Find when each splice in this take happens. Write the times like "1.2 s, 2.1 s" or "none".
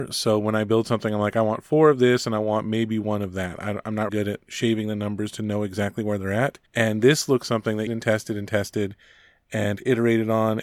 4.1 s, 6.7 s, 7.4 s, 7.9 s